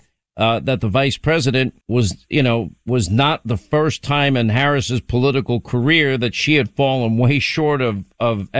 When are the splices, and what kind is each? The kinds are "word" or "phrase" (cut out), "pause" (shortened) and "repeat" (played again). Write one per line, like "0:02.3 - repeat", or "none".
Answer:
0:01.8 - pause